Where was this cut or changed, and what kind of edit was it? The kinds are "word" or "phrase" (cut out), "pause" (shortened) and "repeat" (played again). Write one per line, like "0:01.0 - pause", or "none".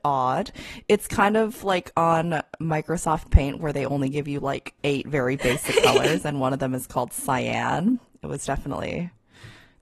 0:04.8 - pause